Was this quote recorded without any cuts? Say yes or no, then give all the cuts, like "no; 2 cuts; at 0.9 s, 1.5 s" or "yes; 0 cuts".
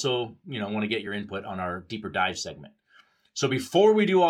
yes; 0 cuts